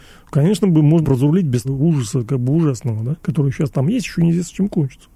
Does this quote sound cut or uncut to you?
cut